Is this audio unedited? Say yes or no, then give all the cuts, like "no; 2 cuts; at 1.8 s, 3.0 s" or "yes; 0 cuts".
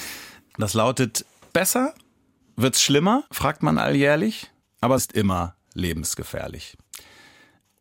no; 3 cuts; at 1.5 s, 3.3 s, 5.0 s